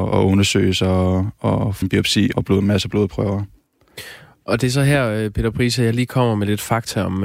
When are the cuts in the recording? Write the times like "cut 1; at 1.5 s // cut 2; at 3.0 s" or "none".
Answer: cut 1; at 1.8 s // cut 2; at 2.3 s